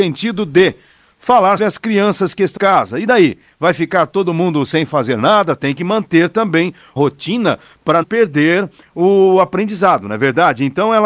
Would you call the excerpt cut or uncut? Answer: cut